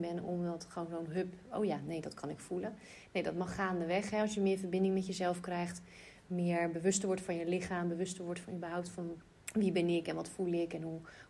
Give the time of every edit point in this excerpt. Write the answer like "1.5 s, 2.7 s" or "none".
9.4 s